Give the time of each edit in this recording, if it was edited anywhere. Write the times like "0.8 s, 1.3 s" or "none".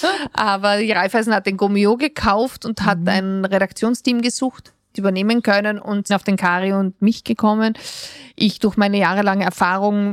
5.0 s, 6.1 s